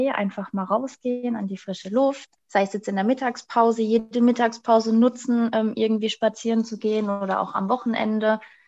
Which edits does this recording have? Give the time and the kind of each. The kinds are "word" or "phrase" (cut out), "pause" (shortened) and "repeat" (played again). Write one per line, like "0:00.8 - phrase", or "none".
0:02.4 - pause